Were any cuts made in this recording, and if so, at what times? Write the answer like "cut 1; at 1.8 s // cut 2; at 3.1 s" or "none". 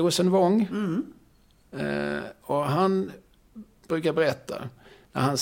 none